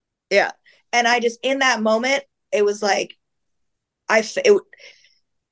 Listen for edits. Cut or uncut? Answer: uncut